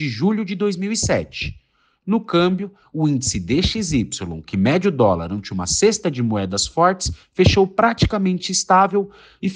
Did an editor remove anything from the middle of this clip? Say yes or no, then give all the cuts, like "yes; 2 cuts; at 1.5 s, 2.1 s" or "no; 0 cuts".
no; 0 cuts